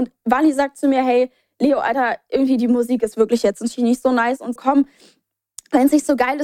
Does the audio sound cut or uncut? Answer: cut